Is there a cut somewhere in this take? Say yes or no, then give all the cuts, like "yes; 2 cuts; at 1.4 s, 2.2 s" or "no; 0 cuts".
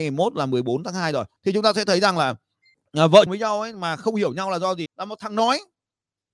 yes; 4 cuts; at 1.4 s, 2.7 s, 3.3 s, 4.9 s